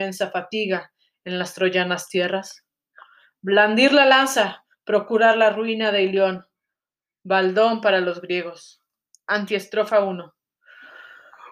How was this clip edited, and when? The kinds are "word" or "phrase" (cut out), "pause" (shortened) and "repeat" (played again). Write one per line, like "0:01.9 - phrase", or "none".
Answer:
none